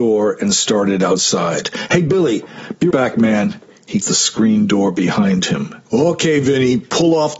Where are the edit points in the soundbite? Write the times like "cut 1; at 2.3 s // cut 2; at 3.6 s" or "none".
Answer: cut 1; at 2.9 s // cut 2; at 4.0 s // cut 3; at 5.8 s